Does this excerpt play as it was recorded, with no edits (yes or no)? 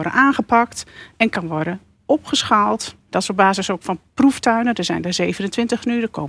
yes